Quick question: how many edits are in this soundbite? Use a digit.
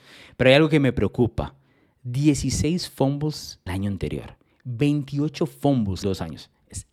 2